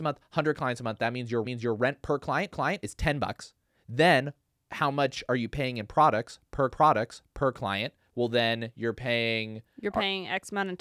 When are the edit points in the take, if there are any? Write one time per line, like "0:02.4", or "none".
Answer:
0:01.4
0:02.5
0:06.7